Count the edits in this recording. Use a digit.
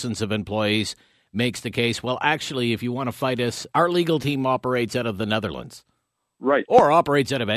1